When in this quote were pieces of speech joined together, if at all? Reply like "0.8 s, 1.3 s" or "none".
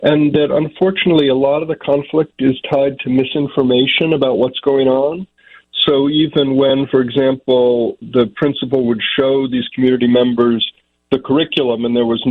none